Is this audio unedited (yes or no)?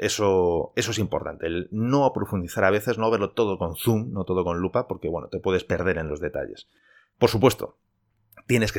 yes